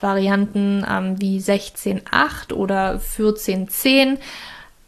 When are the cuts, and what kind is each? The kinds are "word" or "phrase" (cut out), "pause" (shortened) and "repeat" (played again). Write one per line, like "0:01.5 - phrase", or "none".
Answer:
none